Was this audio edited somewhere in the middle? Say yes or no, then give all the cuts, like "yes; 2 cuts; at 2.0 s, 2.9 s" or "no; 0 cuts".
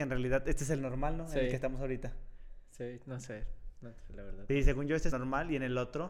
yes; 2 cuts; at 4.5 s, 5.1 s